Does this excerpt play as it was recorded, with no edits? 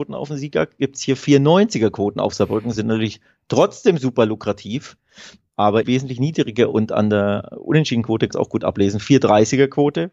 no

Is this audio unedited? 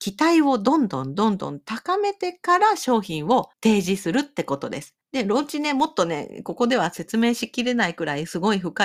no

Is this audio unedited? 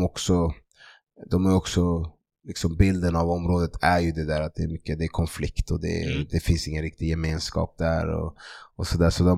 yes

